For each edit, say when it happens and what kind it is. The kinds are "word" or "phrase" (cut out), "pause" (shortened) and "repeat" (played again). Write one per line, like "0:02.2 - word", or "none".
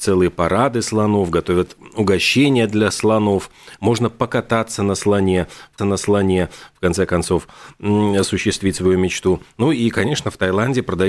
0:05.8 - repeat

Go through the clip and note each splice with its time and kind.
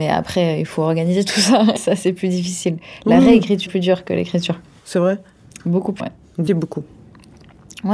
0:01.8 - word
0:03.7 - word
0:06.0 - word
0:06.5 - word

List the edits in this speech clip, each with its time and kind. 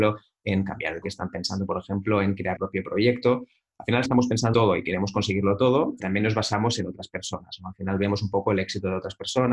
0:01.0 - word
0:02.6 - word
0:04.1 - word
0:04.5 - word
0:06.0 - word

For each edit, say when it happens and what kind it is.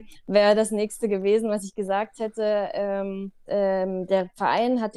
0:03.5 - word

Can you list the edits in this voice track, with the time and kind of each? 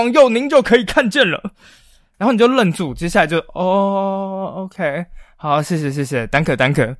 none

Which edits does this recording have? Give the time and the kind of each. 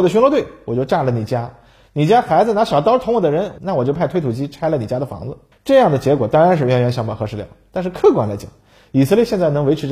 0:05.5 - pause

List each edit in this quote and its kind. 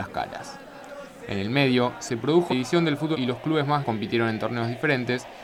0:02.5 - word
0:03.1 - word
0:03.8 - word

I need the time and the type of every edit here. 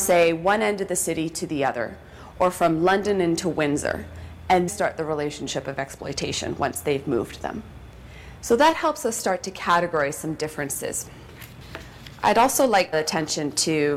0:04.7 - phrase
0:12.9 - phrase

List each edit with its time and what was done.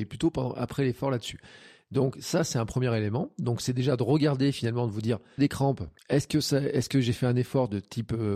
0:05.4 - phrase
0:06.0 - pause

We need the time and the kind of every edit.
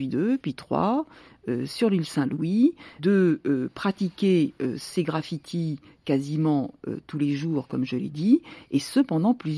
none

